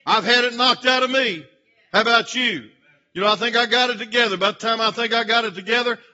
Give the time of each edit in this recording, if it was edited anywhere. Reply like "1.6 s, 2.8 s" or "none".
none